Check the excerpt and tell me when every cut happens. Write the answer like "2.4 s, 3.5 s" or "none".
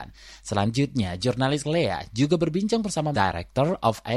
1.6 s, 3.1 s